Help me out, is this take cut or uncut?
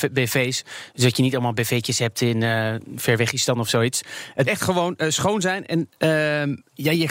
cut